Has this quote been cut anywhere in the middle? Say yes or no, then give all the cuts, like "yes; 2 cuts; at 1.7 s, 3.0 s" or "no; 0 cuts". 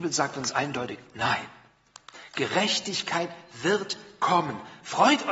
no; 0 cuts